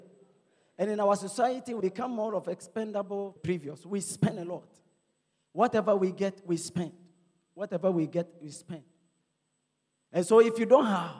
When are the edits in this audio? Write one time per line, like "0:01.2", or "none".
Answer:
0:01.8
0:03.4